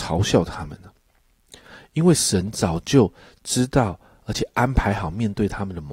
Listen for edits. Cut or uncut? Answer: uncut